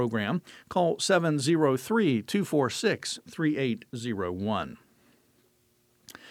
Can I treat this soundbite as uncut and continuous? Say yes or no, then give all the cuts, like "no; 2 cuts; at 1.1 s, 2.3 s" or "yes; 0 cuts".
yes; 0 cuts